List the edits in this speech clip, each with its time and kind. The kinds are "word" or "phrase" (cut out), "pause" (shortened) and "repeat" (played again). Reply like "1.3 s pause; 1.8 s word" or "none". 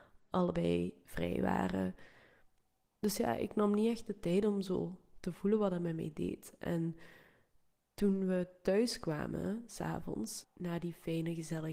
none